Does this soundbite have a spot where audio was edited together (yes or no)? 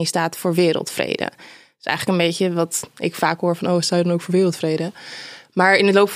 no